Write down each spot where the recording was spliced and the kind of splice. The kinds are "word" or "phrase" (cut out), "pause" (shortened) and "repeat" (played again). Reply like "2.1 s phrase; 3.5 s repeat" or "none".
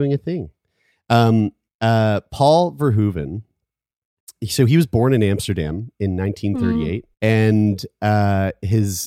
1.7 s pause; 7.1 s pause